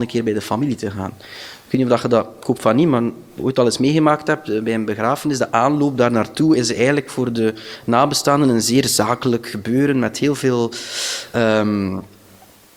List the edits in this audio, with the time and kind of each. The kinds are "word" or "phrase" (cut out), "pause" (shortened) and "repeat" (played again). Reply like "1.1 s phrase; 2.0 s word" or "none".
3.3 s pause